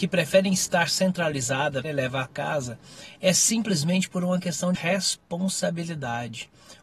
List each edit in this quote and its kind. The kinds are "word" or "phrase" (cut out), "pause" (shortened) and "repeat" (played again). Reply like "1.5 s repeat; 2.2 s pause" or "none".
1.8 s word; 2.3 s word; 4.7 s word